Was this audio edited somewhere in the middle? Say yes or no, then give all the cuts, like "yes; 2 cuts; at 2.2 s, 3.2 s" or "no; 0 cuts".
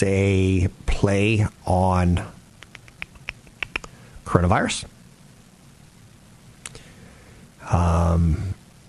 no; 0 cuts